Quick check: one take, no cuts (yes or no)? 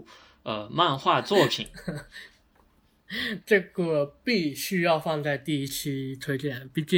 no